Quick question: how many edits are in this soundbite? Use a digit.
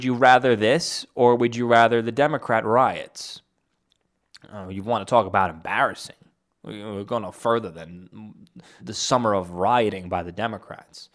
1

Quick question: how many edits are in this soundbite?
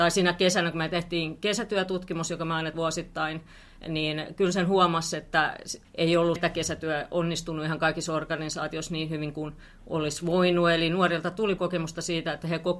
4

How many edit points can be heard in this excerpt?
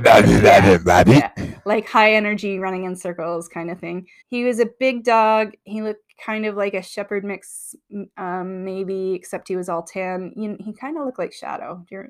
1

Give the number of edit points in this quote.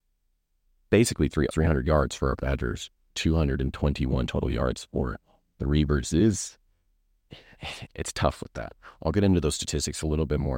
3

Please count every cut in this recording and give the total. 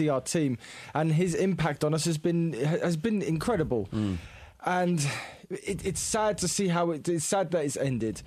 0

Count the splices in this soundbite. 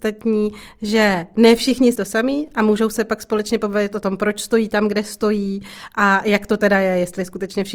1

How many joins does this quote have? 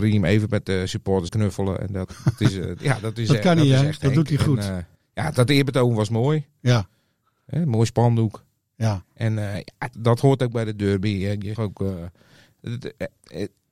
4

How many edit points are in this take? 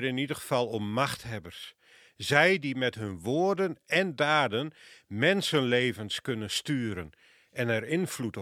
0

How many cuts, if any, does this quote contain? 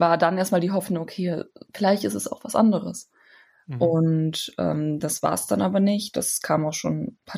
0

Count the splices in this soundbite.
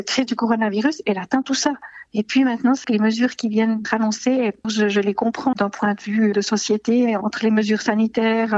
5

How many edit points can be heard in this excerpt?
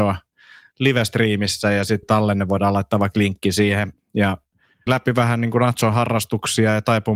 2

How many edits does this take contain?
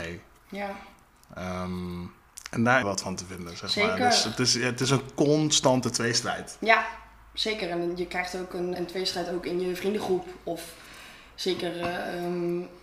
2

